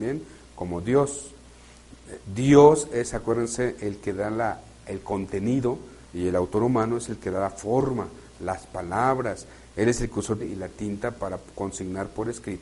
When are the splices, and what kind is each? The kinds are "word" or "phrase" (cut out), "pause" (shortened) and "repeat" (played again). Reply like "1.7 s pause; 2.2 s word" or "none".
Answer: 6.0 s pause; 10.4 s word